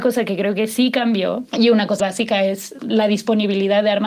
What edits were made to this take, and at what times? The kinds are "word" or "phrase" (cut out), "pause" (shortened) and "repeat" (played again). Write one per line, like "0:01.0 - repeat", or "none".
0:01.5 - pause
0:02.0 - word
0:02.8 - word